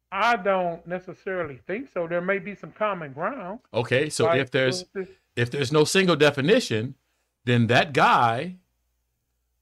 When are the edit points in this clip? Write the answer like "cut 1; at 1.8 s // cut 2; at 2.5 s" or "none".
cut 1; at 3.7 s // cut 2; at 7.1 s